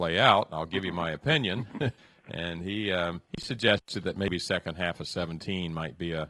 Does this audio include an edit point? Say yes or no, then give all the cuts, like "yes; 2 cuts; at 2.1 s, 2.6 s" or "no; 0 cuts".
yes; 2 cuts; at 2.0 s, 3.3 s